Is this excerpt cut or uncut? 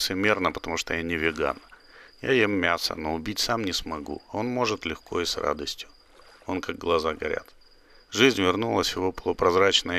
uncut